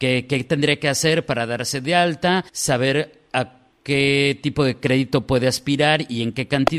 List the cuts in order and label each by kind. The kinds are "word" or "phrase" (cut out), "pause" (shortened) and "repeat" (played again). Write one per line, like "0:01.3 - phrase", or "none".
0:02.5 - pause